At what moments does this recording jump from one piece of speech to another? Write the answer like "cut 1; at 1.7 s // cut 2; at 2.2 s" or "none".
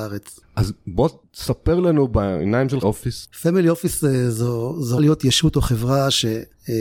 cut 1; at 2.8 s // cut 2; at 3.3 s // cut 3; at 5.0 s